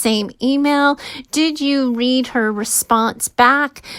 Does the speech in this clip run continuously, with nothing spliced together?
yes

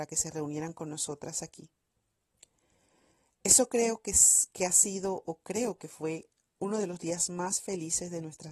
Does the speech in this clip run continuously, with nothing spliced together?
yes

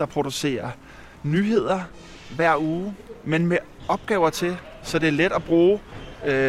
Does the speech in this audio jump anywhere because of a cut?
yes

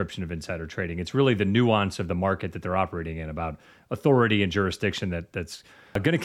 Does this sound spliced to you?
no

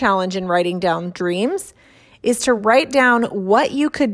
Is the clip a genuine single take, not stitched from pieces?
yes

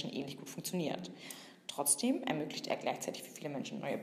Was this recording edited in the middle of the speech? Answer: no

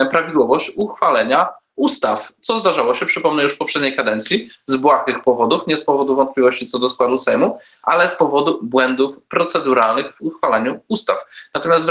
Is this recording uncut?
yes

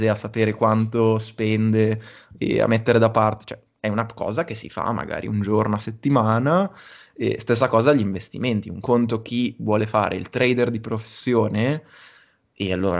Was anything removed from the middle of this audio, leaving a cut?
no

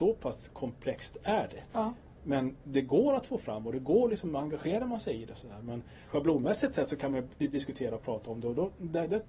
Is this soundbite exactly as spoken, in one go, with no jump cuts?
yes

